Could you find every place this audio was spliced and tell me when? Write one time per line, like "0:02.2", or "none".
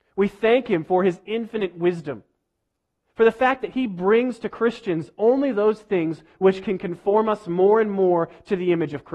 none